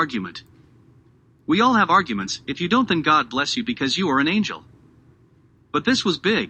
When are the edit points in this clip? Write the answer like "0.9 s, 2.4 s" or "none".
none